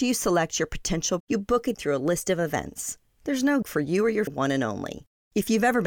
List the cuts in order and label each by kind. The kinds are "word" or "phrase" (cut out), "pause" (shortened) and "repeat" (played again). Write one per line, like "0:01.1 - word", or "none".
0:01.2 - word
0:01.7 - word
0:03.6 - word
0:04.3 - word